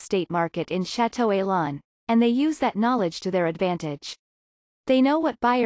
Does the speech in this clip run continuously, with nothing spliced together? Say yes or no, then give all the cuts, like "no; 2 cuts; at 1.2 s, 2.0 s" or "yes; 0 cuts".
yes; 0 cuts